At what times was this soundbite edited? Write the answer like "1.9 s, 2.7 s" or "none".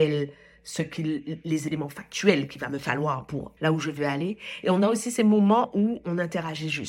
3.6 s